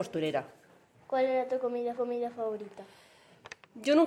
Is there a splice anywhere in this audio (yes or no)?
yes